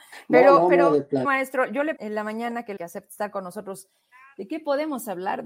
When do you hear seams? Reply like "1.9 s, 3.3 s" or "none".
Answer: 1.2 s, 2.0 s, 2.8 s